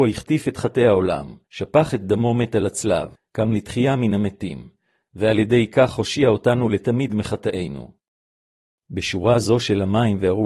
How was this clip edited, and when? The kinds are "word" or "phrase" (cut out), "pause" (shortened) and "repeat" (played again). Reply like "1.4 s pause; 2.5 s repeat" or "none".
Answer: 1.4 s pause; 3.1 s pause